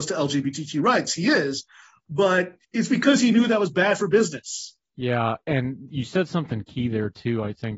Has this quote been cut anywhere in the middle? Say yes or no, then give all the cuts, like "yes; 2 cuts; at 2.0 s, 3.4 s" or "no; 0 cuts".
yes; 2 cuts; at 2.6 s, 4.8 s